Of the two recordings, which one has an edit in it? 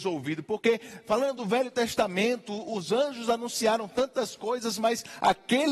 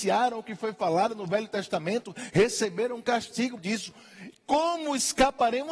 second; 1 cut; at 3.6 s

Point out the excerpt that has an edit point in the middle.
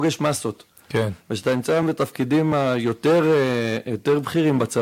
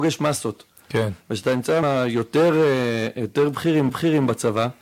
second; 2 cuts; at 1.8 s, 3.9 s

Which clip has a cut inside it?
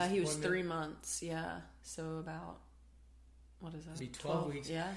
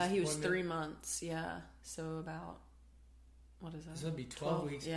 first; 1 cut; at 4.0 s

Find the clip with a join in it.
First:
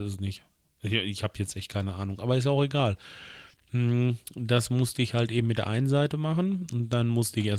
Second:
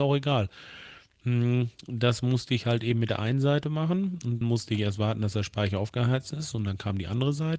second; 1 cut; at 4.4 s

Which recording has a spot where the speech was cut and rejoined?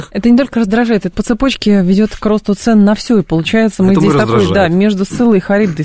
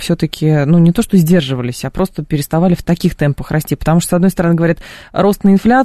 first; 1 cut; at 1.1 s

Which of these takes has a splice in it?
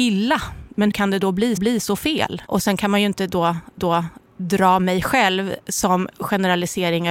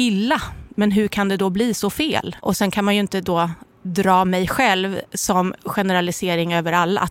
first; 3 cuts; at 0.9 s, 1.6 s, 3.8 s

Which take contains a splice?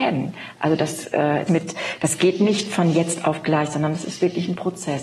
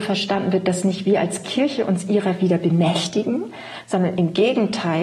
first; 1 cut; at 1.5 s

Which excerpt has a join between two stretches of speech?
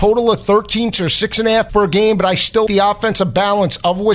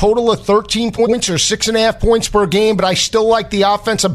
first; 3 cuts; at 0.9 s, 1.7 s, 2.7 s

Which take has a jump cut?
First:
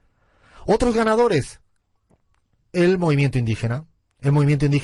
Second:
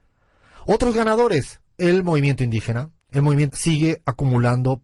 second; 3 cuts; at 1.7 s, 3.0 s, 3.5 s

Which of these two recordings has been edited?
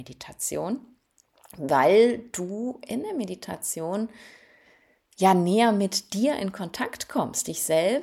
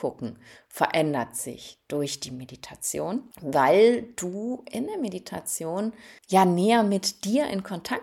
second; 2 cuts; at 3.3 s, 6.2 s

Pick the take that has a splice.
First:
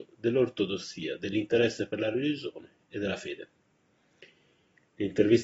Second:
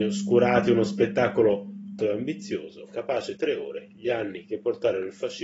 second; 2 cuts; at 2.0 s, 3.4 s

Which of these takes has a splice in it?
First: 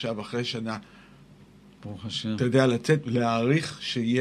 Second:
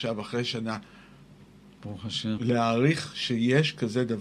second; 1 cut; at 2.4 s

